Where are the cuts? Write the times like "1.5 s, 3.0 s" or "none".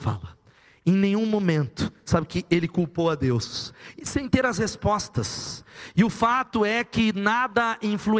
none